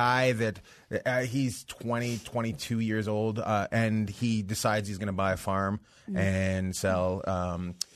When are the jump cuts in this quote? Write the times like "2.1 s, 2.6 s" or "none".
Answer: none